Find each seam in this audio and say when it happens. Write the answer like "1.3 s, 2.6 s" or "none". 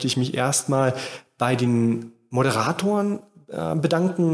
none